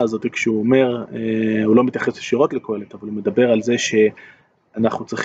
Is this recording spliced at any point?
no; 0 cuts

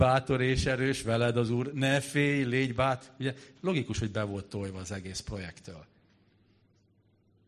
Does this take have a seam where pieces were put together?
no; 0 cuts

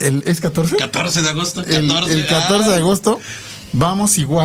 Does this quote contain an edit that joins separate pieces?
no; 0 cuts

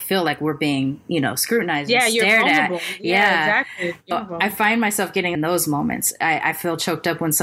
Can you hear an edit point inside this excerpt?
yes; 2 cuts; at 4.1 s, 5.3 s

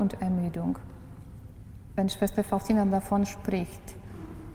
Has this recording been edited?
no; 0 cuts

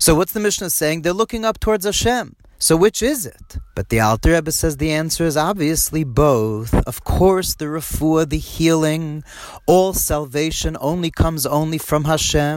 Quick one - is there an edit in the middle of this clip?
yes; 1 cut; at 3.7 s

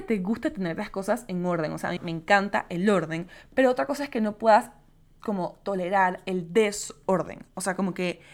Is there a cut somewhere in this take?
yes; 1 cut; at 2.0 s

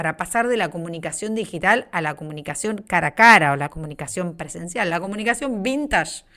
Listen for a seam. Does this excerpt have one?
no; 0 cuts

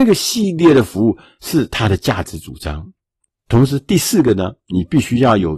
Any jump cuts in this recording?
no; 0 cuts

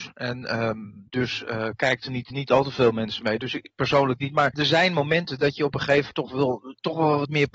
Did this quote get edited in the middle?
yes; 4 cuts; at 1.1 s, 2.3 s, 4.5 s, 6.1 s

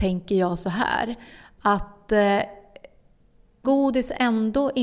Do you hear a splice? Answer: yes; 1 cut; at 3.6 s

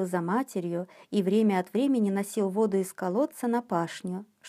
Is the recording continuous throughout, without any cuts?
yes; 0 cuts

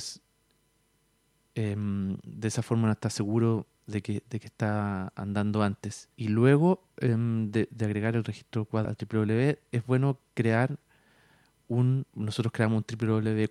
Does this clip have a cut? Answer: yes; 4 cuts; at 3.7 s, 6.1 s, 8.8 s, 12.1 s

